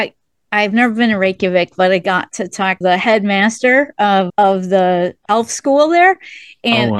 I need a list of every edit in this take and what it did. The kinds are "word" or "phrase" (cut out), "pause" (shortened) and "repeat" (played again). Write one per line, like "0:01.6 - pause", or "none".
0:02.8 - word
0:04.3 - word
0:05.3 - word